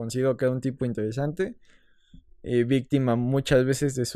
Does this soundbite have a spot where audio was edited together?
no; 0 cuts

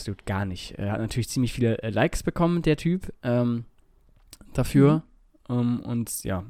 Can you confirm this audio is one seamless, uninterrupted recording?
yes; 0 cuts

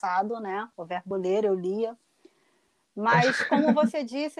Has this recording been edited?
no; 0 cuts

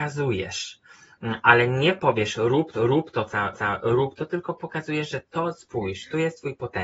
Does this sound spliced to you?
yes; 2 cuts; at 2.7 s, 3.5 s

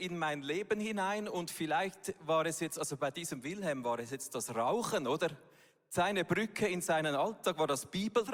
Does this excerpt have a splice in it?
no; 0 cuts

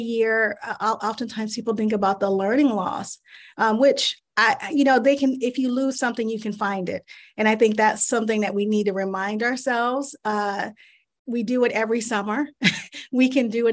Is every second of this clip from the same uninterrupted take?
yes; 0 cuts

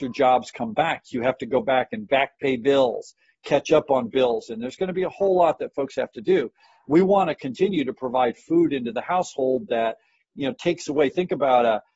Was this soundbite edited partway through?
no; 0 cuts

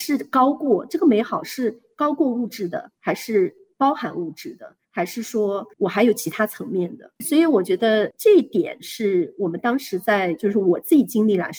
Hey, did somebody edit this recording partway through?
yes; 4 cuts; at 3.0 s, 4.8 s, 5.7 s, 7.2 s

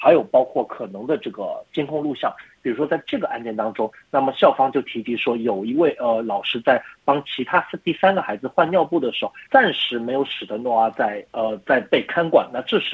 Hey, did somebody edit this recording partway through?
yes; 1 cut; at 9.5 s

